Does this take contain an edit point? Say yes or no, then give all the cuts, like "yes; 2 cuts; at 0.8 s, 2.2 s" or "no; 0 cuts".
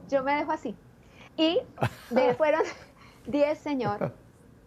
yes; 3 cuts; at 1.3 s, 2.4 s, 3.6 s